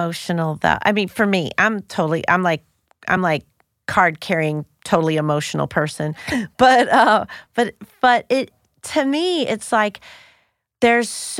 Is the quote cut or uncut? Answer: uncut